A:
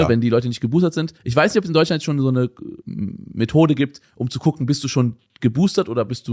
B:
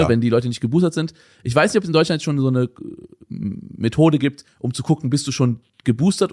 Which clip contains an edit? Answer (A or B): A